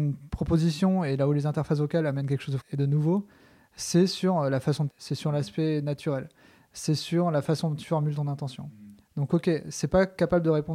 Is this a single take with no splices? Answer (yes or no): no